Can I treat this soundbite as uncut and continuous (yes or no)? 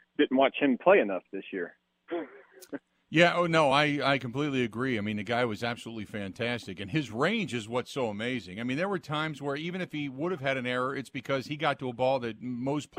yes